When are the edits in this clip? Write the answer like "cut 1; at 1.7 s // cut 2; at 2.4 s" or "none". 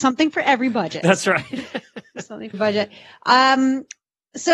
cut 1; at 2.5 s